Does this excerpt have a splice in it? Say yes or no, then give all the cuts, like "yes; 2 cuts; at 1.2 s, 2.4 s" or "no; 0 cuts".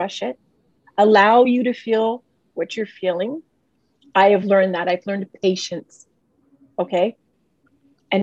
no; 0 cuts